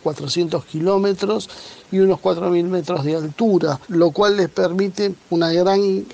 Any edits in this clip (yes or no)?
yes